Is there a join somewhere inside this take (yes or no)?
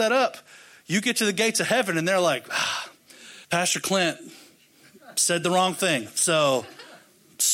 yes